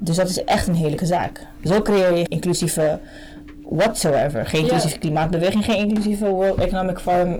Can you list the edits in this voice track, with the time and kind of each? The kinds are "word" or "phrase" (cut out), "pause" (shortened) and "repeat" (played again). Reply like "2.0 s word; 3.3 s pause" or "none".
1.0 s word; 2.3 s word